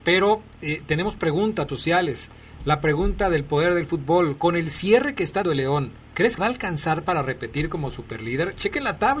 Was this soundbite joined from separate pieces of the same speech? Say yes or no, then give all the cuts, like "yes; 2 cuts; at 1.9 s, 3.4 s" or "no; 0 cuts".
yes; 4 cuts; at 1.7 s, 5.4 s, 6.0 s, 6.4 s